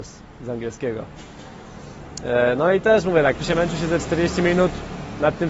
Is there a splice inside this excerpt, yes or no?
yes